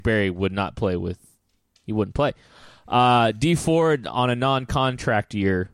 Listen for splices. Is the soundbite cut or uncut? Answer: uncut